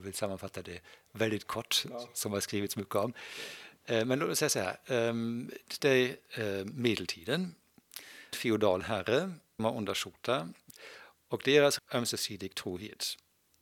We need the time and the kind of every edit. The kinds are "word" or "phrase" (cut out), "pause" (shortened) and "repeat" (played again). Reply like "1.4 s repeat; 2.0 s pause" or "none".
3.8 s pause; 5.8 s word; 8.3 s word; 9.6 s word; 11.8 s phrase